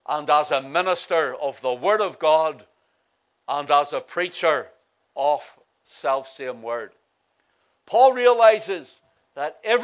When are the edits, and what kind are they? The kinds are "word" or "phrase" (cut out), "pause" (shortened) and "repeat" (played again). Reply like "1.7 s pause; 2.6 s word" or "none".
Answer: 5.6 s word